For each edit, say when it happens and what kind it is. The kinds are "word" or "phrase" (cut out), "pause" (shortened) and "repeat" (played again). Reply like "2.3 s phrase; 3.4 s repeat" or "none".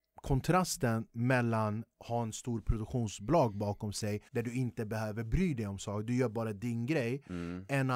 4.3 s pause